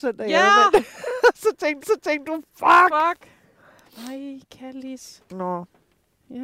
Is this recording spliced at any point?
yes; 1 cut; at 1.8 s

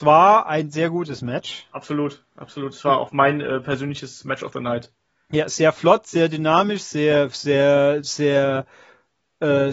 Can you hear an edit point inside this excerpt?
no; 0 cuts

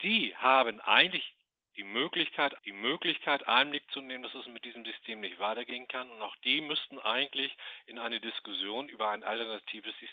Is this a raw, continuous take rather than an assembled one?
no; 1 cut; at 2.6 s

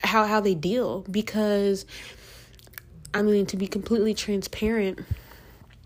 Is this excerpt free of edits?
yes; 0 cuts

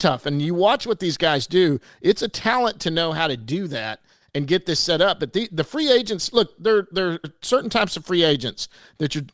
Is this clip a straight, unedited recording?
no; 1 cut; at 7.2 s

